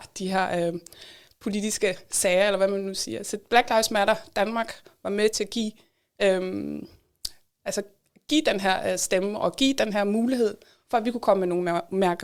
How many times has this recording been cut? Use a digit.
0